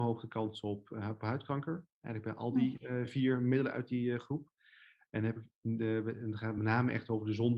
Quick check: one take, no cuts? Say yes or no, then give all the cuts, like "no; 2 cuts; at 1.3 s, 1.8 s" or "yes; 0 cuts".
yes; 0 cuts